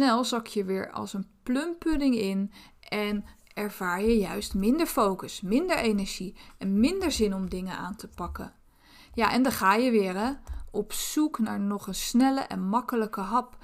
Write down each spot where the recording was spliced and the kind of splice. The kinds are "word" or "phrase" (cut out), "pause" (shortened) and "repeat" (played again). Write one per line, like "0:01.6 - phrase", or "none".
none